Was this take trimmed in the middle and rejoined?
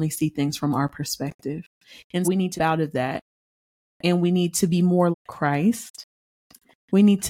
yes; 3 cuts; at 2.2 s, 2.6 s, 5.1 s

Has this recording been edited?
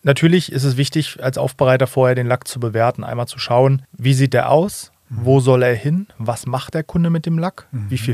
yes; 1 cut; at 3.8 s

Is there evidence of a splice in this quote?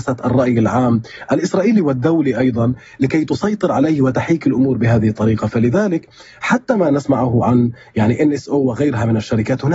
no; 0 cuts

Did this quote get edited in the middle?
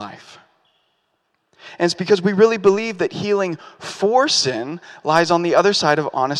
no; 0 cuts

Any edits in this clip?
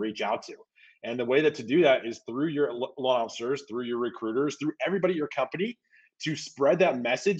no; 0 cuts

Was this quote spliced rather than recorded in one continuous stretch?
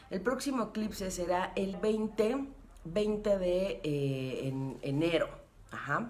yes; 1 cut; at 1.7 s

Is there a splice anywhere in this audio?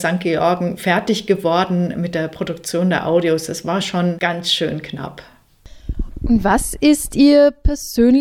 no; 0 cuts

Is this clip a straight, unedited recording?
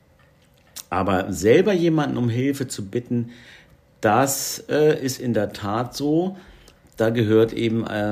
yes; 0 cuts

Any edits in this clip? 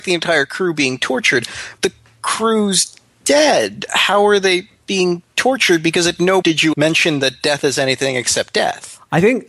yes; 3 cuts; at 1.8 s, 6.4 s, 6.7 s

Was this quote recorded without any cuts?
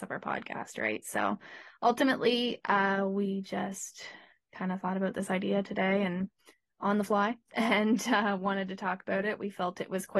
yes; 0 cuts

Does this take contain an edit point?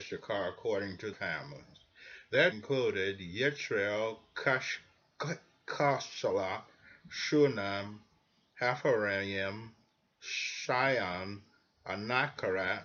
yes; 2 cuts; at 1.1 s, 2.5 s

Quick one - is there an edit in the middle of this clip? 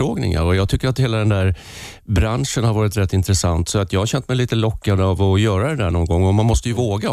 no; 0 cuts

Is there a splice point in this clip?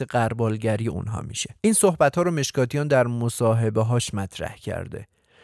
yes; 1 cut; at 1.6 s

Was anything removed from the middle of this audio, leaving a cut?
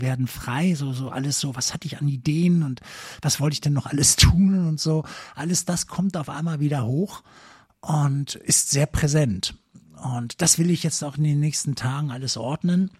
no; 0 cuts

